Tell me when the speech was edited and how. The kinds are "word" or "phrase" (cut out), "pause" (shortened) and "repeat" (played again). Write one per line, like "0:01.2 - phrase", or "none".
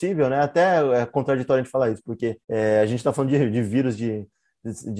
0:02.4 - pause

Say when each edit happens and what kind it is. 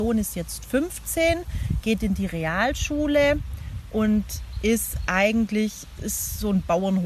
0:06.0 - word

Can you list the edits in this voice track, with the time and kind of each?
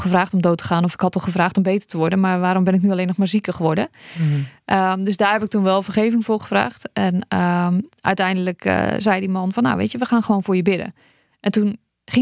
none

